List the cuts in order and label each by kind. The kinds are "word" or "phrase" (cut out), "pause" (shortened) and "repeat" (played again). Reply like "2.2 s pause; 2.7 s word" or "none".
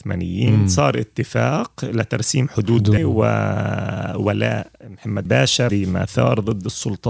3.0 s word; 5.3 s word; 5.7 s word